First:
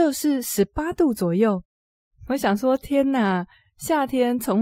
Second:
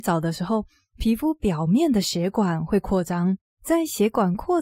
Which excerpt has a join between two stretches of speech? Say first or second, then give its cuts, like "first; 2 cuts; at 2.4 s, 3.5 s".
second; 1 cut; at 3.4 s